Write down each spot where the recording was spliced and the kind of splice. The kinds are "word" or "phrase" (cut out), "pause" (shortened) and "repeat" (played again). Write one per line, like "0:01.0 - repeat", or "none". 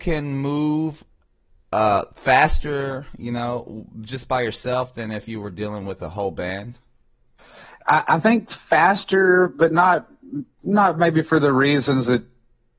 none